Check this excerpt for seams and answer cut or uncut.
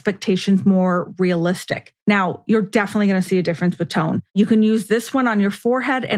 cut